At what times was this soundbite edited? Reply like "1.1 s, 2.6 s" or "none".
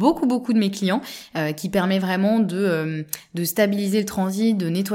none